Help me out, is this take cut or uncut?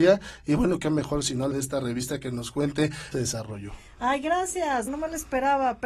cut